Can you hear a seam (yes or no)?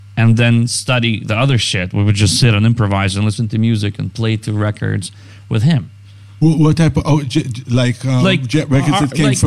no